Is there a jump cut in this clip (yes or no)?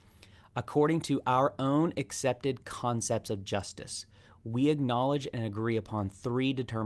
no